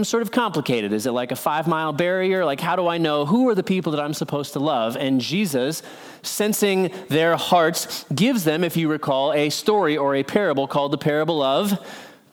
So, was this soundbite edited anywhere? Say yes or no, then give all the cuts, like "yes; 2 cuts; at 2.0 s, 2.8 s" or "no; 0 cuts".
no; 0 cuts